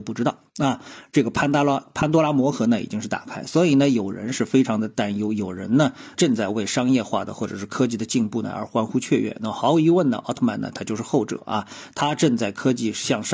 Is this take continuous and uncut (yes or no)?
no